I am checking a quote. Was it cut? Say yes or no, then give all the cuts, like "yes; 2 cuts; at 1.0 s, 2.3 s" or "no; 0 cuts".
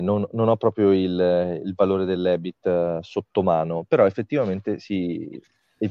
no; 0 cuts